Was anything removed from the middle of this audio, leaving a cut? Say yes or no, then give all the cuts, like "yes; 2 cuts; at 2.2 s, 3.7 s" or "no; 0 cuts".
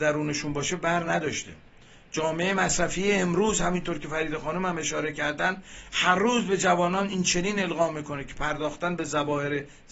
no; 0 cuts